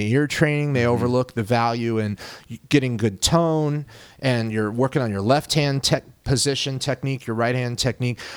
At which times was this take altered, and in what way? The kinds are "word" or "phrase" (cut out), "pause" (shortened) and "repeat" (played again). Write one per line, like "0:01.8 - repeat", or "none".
none